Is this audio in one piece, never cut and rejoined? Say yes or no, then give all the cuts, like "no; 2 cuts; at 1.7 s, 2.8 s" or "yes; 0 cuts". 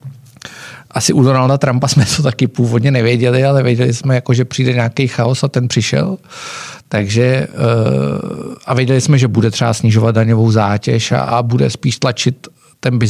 yes; 0 cuts